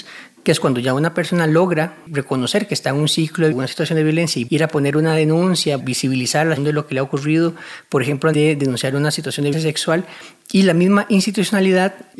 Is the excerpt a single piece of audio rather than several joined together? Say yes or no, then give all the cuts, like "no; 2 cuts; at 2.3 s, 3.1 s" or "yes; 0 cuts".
no; 6 cuts; at 3.5 s, 4.5 s, 5.8 s, 6.6 s, 8.3 s, 9.5 s